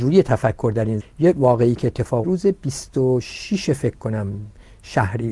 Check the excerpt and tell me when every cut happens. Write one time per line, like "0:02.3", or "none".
0:01.0
0:02.2